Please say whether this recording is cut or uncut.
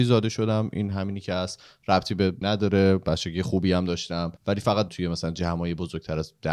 cut